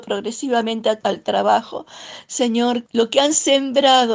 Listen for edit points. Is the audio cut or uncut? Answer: cut